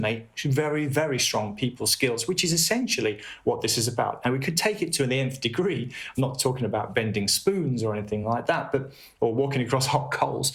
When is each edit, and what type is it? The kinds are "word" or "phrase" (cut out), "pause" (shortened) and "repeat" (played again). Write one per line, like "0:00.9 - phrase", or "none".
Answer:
none